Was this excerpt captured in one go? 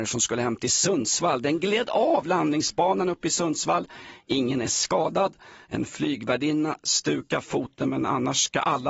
yes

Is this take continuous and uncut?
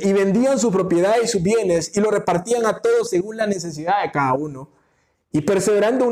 yes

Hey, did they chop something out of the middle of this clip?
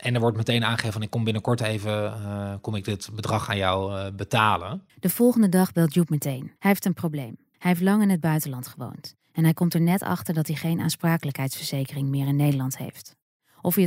yes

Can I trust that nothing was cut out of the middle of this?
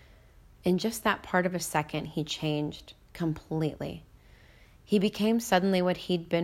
no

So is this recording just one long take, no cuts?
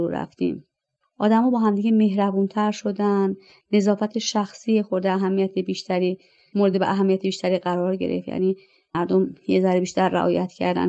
yes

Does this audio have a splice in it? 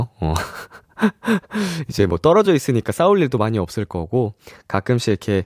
no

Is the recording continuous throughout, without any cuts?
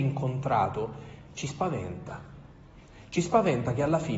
yes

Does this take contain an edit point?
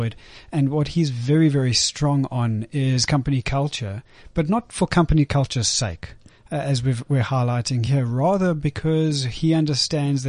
no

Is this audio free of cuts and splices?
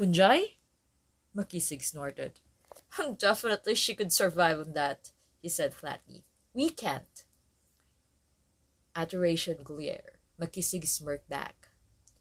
no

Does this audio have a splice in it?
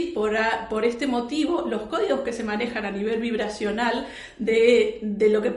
no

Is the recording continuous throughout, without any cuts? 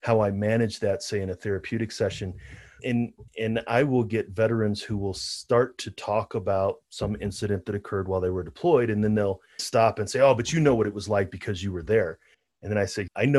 no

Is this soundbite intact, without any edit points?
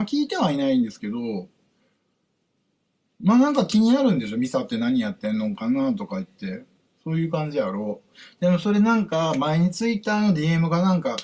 yes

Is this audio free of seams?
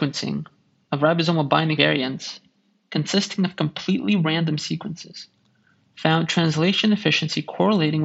no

